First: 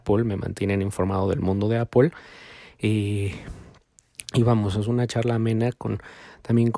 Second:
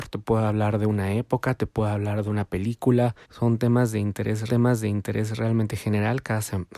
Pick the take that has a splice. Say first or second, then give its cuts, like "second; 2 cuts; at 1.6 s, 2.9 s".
second; 2 cuts; at 3.2 s, 4.5 s